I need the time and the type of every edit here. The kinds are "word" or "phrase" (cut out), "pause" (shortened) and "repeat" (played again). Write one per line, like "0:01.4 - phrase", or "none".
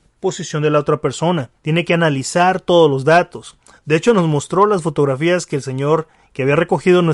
0:01.6 - pause